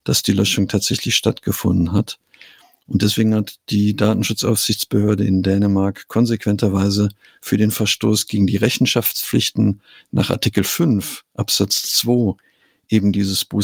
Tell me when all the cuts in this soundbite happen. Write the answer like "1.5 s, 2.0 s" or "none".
none